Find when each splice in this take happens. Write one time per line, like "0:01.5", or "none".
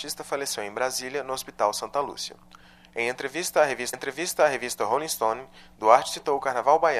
0:03.9